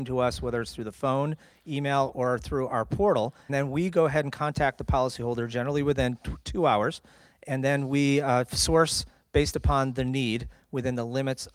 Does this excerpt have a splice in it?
yes; 1 cut; at 3.5 s

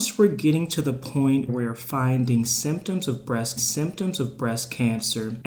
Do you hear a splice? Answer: yes; 2 cuts; at 1.5 s, 3.6 s

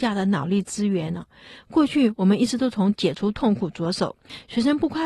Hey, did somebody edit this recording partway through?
no; 0 cuts

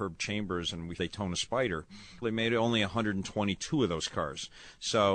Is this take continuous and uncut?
no; 2 cuts; at 1.0 s, 2.2 s

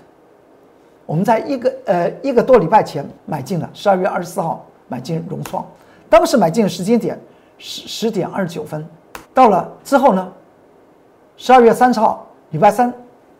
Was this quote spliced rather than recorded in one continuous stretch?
yes; 3 cuts; at 3.2 s, 9.2 s, 9.8 s

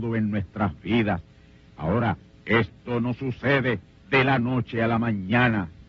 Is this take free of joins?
yes; 0 cuts

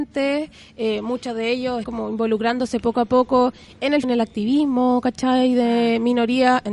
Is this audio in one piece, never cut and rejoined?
no; 2 cuts; at 1.8 s, 4.0 s

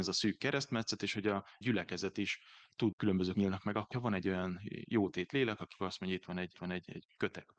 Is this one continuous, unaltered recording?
no; 6 cuts; at 1.6 s, 2.9 s, 3.3 s, 3.9 s, 5.7 s, 6.5 s

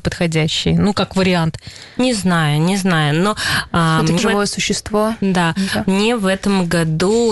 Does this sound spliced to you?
yes; 1 cut; at 4.2 s

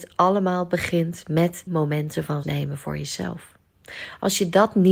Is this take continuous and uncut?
no; 2 cuts; at 1.7 s, 2.4 s

